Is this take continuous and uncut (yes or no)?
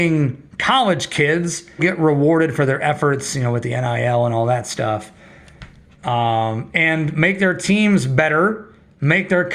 no